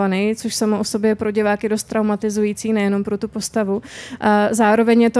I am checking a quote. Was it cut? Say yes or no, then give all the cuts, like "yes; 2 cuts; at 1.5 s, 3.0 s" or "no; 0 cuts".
no; 0 cuts